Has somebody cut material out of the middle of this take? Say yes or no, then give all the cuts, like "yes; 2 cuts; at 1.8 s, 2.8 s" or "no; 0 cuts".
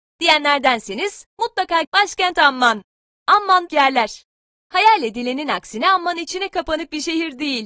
yes; 2 cuts; at 1.8 s, 3.7 s